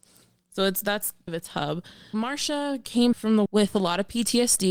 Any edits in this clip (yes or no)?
yes